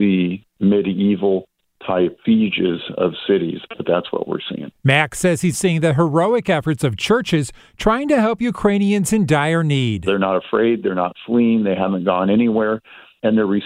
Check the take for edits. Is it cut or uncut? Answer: cut